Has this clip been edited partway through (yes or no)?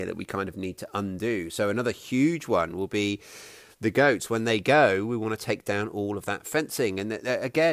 no